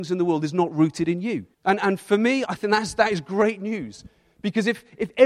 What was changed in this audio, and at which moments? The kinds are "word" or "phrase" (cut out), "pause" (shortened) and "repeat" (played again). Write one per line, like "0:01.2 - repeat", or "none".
0:01.5 - pause
0:02.5 - word